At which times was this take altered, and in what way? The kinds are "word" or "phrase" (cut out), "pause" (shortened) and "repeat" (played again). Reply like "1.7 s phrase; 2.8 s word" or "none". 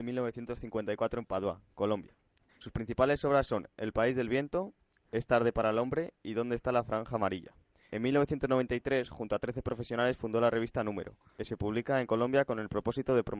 none